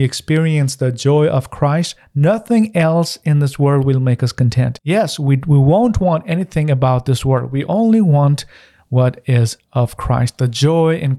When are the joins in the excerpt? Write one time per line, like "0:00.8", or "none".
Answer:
none